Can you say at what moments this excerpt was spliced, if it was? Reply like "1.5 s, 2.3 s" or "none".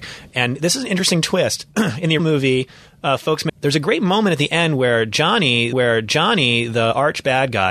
2.2 s, 3.5 s, 5.7 s